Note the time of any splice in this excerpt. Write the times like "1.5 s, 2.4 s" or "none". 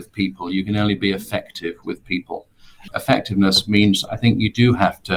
none